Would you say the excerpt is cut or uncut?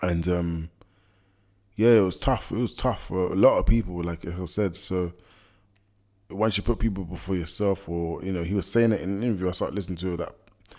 uncut